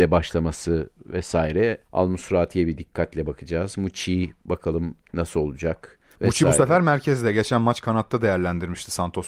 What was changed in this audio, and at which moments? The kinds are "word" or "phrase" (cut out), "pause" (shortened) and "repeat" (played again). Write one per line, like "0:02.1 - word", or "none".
0:01.8 - pause
0:05.0 - pause
0:06.1 - pause